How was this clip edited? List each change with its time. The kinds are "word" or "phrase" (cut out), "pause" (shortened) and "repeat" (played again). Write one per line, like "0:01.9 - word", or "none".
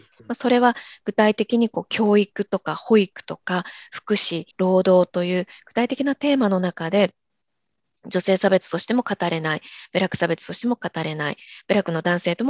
0:04.5 - pause

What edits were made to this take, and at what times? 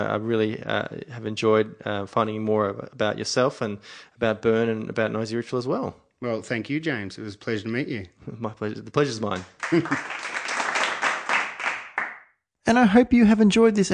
none

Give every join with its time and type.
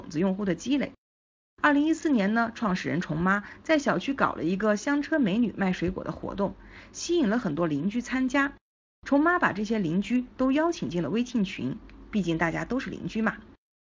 none

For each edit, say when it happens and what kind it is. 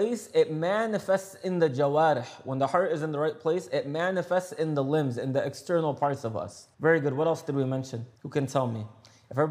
0:06.7 - pause
0:08.2 - pause

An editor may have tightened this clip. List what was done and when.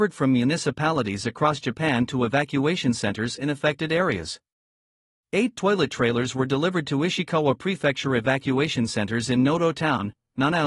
none

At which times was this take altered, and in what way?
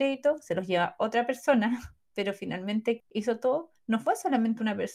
0:03.0 - word

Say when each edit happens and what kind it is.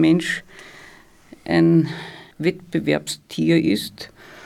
0:02.3 - pause

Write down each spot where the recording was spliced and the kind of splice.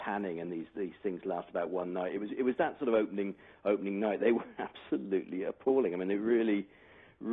none

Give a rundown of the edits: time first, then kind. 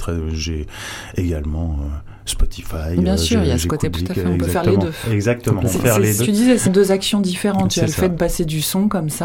0:03.9 - word
0:05.7 - word
0:06.2 - word
0:06.6 - word
0:08.1 - word

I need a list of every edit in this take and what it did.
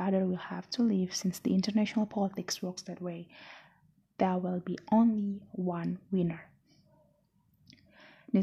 none

